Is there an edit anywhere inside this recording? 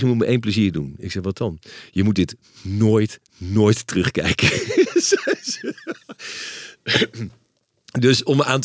no; 0 cuts

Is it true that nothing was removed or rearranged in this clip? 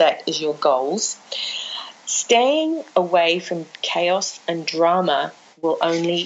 yes; 0 cuts

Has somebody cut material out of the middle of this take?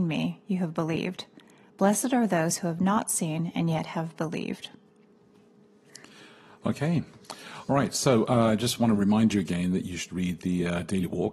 no; 0 cuts

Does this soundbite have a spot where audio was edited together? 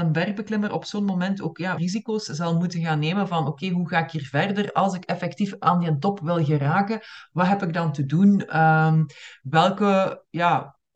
yes; 1 cut; at 1.8 s

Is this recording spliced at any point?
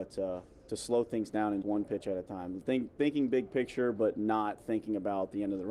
yes; 1 cut; at 1.6 s

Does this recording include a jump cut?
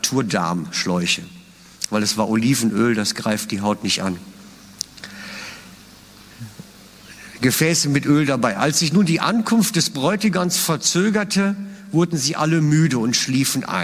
no; 0 cuts

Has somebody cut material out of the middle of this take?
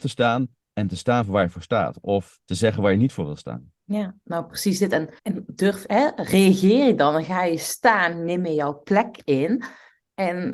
yes; 3 cuts; at 2.4 s, 3.8 s, 5.2 s

